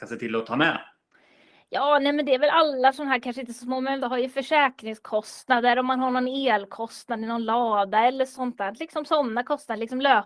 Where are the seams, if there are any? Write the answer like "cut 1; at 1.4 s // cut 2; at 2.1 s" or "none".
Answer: cut 1; at 4.0 s